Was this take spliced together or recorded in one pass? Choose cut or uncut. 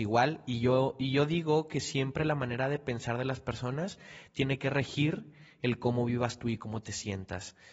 uncut